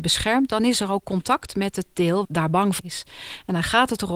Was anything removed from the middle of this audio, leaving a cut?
yes; 2 cuts; at 2.2 s, 2.8 s

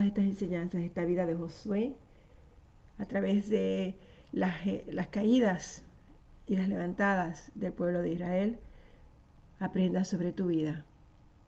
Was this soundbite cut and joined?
no; 0 cuts

